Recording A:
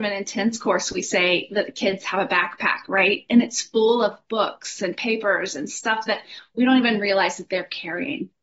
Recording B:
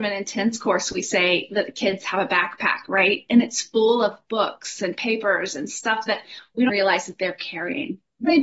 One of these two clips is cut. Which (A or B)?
B